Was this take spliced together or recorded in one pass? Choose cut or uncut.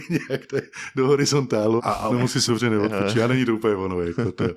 cut